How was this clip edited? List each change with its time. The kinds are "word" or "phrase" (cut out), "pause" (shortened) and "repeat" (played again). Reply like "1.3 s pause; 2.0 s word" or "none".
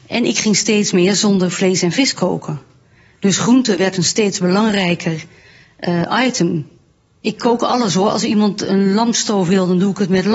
none